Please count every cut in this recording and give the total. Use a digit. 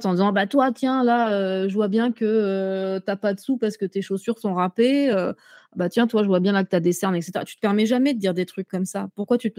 0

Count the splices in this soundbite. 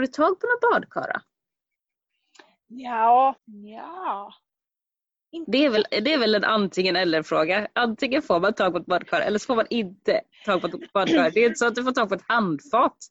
1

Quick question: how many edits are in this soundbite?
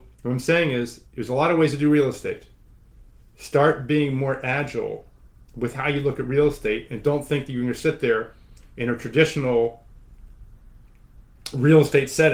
1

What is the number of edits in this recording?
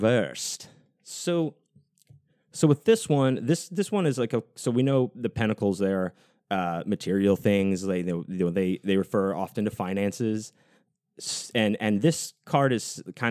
0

